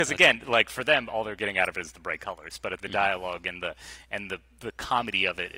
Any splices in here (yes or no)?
yes